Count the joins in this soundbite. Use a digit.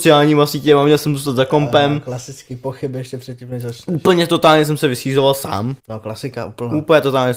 1